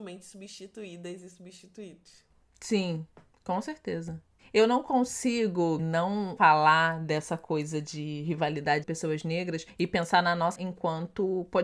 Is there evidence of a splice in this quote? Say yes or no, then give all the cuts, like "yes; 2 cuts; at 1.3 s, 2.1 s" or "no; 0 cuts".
yes; 3 cuts; at 5.8 s, 8.8 s, 10.6 s